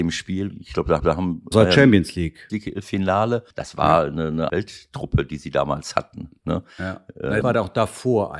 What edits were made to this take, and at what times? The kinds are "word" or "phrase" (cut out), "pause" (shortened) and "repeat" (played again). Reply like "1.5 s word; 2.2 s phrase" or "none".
1.0 s repeat; 1.5 s word; 2.5 s word; 3.5 s pause; 4.5 s word; 7.4 s word

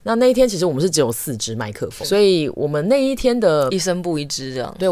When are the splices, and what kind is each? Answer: 2.0 s word

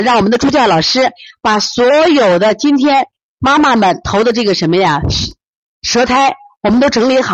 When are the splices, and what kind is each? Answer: none

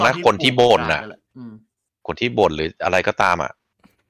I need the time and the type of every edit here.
none

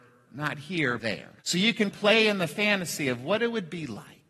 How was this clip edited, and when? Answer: 1.0 s word; 1.4 s pause; 1.9 s phrase

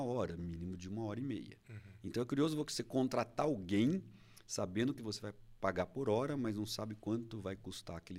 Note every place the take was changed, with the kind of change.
none

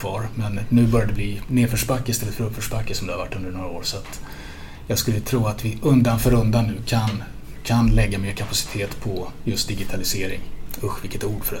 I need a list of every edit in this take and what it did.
none

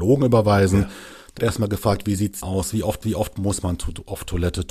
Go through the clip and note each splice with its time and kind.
1.4 s word; 2.4 s word; 3.0 s repeat

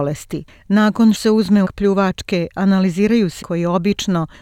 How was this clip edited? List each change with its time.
1.1 s word; 1.6 s word; 3.4 s word

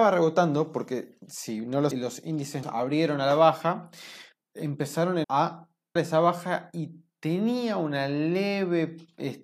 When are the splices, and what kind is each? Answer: 1.9 s phrase; 2.6 s word; 4.4 s word; 5.2 s phrase; 6.0 s word

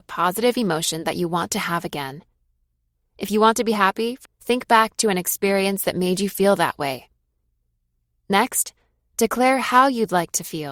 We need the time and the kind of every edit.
4.2 s word

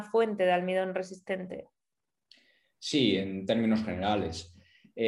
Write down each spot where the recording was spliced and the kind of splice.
none

